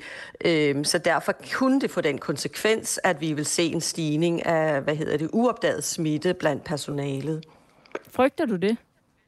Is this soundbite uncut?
yes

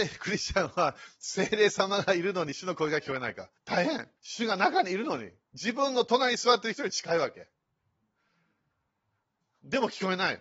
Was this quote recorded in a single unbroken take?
no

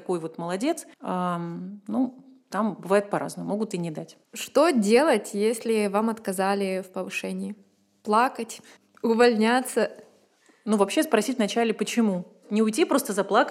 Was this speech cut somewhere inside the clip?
yes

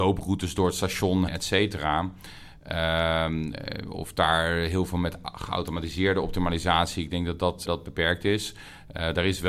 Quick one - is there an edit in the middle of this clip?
yes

